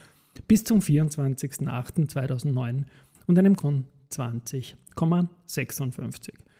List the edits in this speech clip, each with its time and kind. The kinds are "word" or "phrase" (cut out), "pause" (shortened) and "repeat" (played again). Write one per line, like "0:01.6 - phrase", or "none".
0:03.6 - word